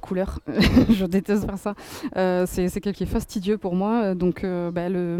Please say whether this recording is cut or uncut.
cut